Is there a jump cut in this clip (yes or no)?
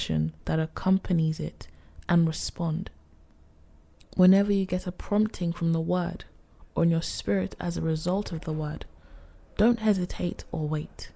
no